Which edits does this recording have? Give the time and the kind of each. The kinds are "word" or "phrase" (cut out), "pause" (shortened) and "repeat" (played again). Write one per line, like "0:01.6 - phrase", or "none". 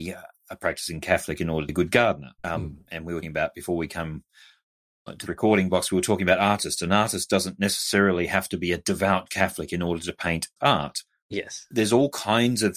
0:01.7 - word
0:02.4 - pause
0:03.2 - word
0:05.3 - word
0:10.6 - word